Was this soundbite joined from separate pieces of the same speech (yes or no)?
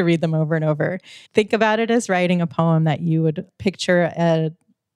yes